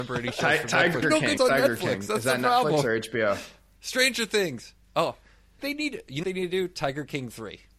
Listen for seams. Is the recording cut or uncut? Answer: cut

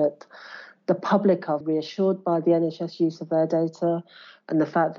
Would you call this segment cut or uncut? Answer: cut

